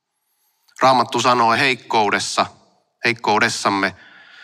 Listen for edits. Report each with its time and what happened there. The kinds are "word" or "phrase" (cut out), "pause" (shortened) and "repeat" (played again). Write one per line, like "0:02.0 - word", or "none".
0:01.5 - phrase